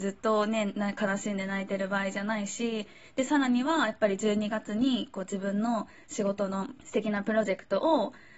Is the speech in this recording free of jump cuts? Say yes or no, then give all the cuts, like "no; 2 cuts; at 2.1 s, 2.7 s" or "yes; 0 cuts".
no; 1 cut; at 6.8 s